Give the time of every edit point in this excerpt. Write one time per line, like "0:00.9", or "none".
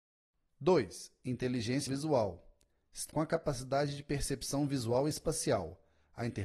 0:01.9
0:03.1